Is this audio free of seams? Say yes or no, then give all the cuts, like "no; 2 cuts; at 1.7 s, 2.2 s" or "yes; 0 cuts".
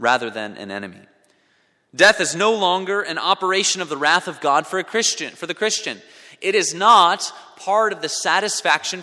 yes; 0 cuts